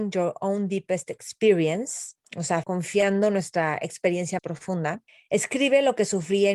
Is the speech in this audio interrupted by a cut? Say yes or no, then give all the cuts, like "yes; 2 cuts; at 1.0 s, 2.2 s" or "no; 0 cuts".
yes; 4 cuts; at 2.2 s, 2.6 s, 4.4 s, 5.1 s